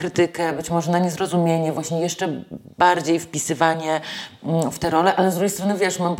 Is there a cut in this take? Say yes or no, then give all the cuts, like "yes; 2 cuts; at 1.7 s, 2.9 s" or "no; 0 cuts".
no; 0 cuts